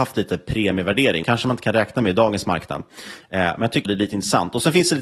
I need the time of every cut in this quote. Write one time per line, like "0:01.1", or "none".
0:01.2
0:03.9

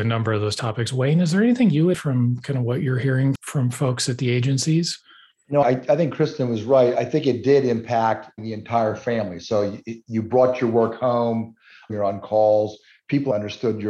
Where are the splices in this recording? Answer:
0:01.9
0:03.4
0:05.6

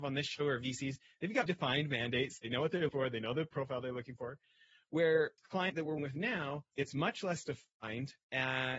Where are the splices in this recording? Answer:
0:01.5
0:02.9
0:03.5
0:05.4
0:06.0

